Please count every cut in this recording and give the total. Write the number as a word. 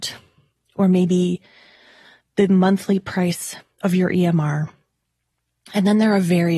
zero